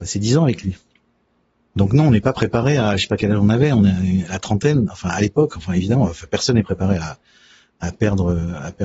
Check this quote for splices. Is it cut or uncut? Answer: uncut